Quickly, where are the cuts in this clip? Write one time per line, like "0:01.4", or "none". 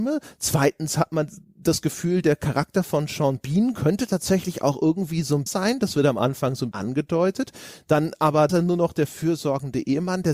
0:05.5
0:06.7
0:08.5